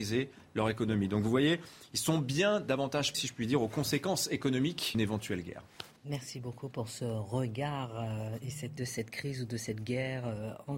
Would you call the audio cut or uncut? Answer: cut